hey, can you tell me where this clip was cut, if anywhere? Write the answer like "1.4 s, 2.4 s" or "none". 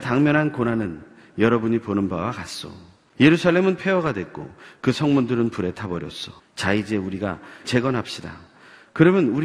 6.4 s, 7.6 s

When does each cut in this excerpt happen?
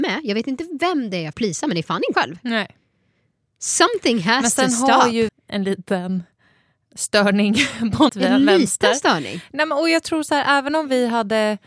1.3 s, 2.1 s, 5.3 s, 8.1 s

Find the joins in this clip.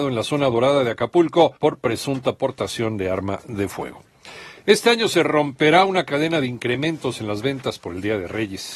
1.6 s

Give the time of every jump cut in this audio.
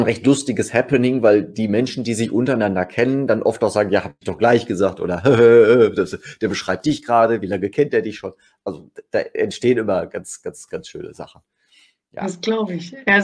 none

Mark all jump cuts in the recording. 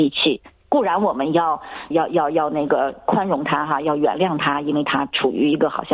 1.9 s

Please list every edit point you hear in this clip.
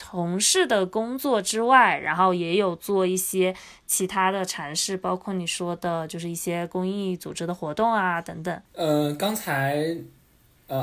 8.6 s

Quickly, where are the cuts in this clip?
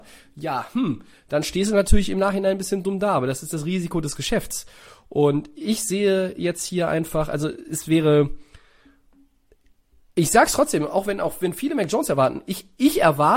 none

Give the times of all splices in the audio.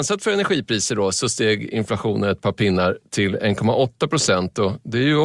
none

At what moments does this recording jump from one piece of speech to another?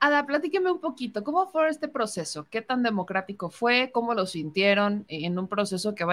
none

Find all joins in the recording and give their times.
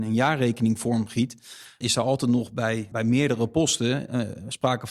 1.8 s, 2.9 s

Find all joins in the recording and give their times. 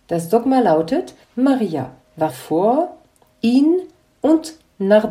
1.2 s, 2.3 s

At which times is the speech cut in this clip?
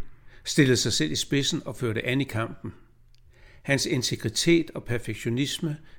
none

